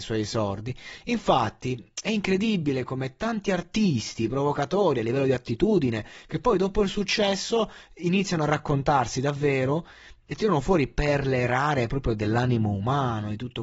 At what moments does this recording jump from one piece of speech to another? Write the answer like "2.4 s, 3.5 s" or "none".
none

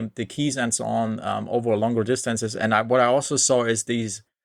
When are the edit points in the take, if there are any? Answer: none

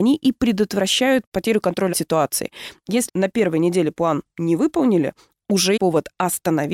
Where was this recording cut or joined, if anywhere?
1.9 s, 3.1 s, 5.8 s

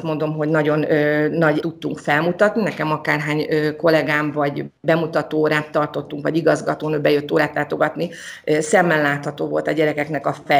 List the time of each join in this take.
1.6 s

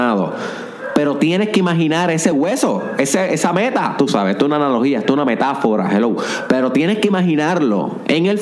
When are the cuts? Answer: none

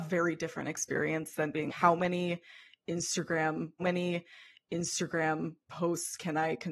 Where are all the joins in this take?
1.7 s, 3.8 s

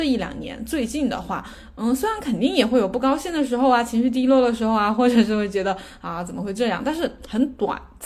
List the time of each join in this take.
none

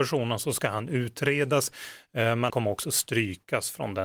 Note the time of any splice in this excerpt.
2.5 s

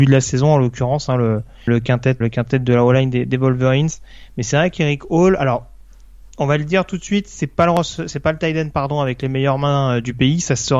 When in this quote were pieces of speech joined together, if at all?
1.7 s, 2.2 s

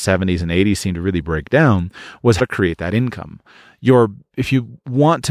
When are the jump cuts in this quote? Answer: 2.4 s

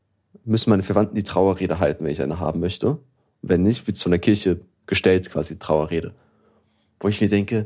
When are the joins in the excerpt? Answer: none

